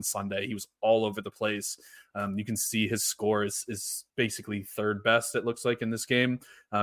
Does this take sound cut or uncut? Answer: cut